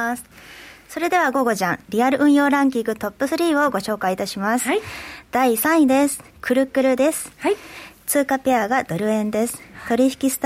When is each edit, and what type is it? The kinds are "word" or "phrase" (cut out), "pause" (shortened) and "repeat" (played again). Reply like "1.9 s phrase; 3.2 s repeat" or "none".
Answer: 6.3 s pause